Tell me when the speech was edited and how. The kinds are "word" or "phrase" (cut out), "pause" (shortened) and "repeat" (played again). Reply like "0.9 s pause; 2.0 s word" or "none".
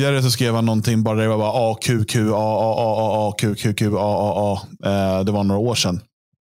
none